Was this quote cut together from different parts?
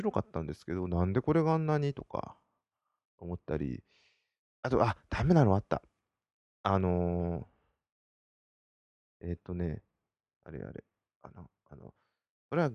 no; 0 cuts

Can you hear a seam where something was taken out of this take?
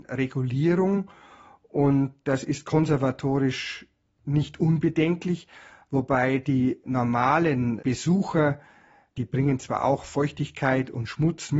no; 0 cuts

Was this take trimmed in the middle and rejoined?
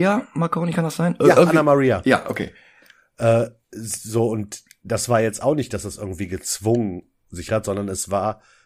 yes; 1 cut; at 7.5 s

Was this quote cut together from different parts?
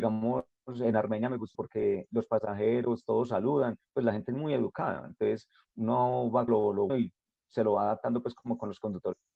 yes; 3 cuts; at 1.5 s, 6.5 s, 6.9 s

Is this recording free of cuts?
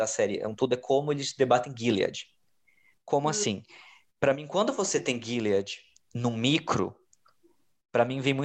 yes; 0 cuts

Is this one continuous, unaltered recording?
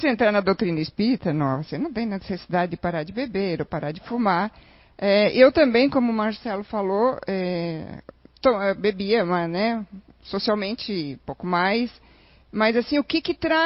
yes; 0 cuts

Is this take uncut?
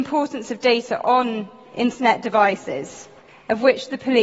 yes; 0 cuts

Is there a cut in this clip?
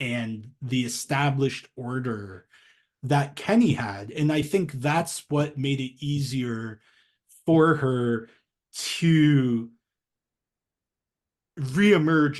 no; 0 cuts

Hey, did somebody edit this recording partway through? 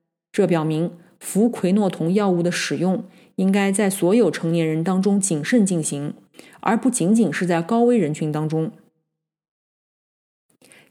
no; 0 cuts

